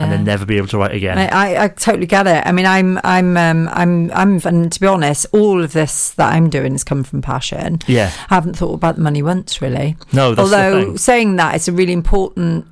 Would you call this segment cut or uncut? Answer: cut